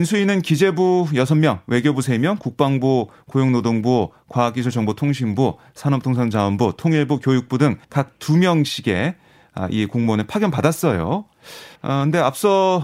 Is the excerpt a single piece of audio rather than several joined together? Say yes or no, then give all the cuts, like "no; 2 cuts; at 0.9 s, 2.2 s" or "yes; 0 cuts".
no; 2 cuts; at 7.8 s, 11.8 s